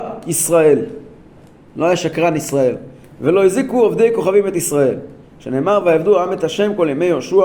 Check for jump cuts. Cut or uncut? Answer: uncut